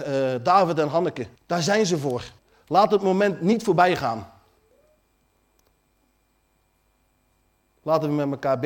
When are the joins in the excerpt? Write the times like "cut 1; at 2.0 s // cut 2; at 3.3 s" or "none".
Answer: cut 1; at 1.4 s // cut 2; at 2.4 s